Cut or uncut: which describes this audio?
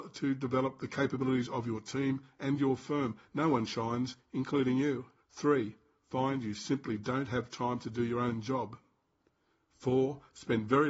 cut